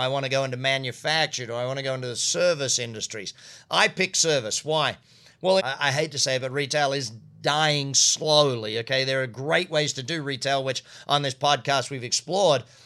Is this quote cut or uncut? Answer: cut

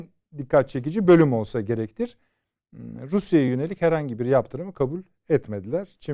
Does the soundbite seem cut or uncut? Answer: uncut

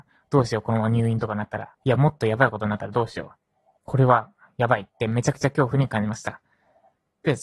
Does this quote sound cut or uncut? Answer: cut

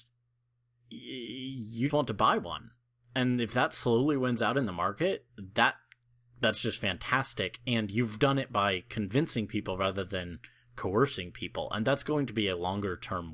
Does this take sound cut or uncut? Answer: cut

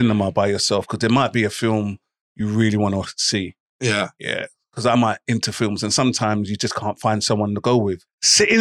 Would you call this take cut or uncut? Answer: uncut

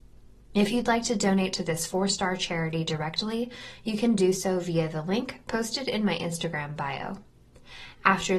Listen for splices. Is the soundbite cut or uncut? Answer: uncut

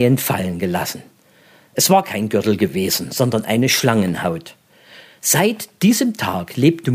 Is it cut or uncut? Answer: uncut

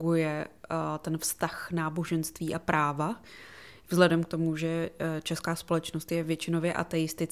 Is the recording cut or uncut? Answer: uncut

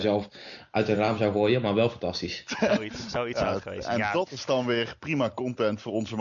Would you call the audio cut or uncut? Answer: uncut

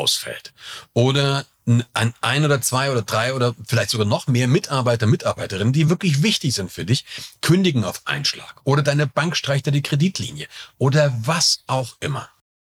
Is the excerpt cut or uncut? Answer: uncut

